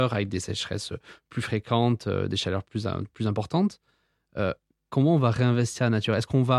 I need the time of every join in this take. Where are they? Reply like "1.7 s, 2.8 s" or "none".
none